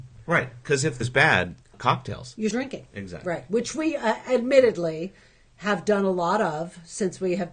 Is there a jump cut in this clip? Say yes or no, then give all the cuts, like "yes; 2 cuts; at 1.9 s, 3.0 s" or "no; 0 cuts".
yes; 3 cuts; at 1.0 s, 1.7 s, 2.5 s